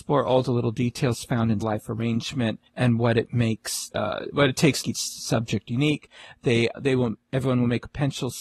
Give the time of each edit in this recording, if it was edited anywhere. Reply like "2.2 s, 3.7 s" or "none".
1.6 s, 2.7 s, 3.9 s, 4.8 s, 6.7 s

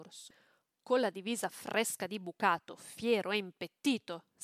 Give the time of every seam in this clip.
none

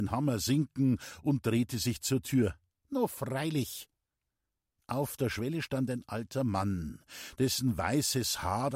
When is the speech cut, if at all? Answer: none

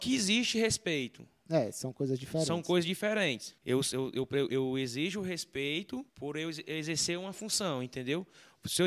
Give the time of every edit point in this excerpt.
3.6 s, 4.5 s, 6.1 s

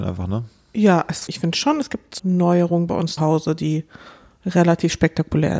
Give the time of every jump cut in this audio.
1.3 s, 2.2 s, 3.2 s

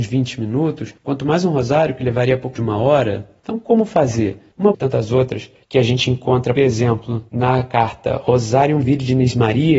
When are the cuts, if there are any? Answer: 2.6 s, 4.7 s, 6.6 s

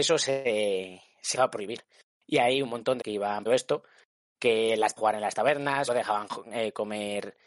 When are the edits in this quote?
1.3 s, 3.0 s, 3.5 s, 5.0 s, 5.9 s

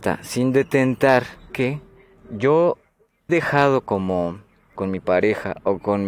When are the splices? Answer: 1.5 s, 3.3 s, 4.7 s

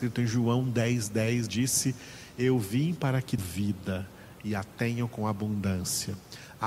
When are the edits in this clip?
1.5 s, 3.4 s

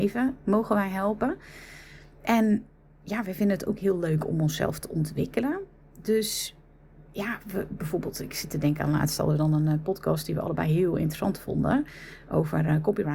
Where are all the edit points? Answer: none

